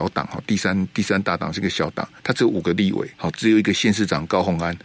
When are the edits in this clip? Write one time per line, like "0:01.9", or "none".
0:02.2
0:03.1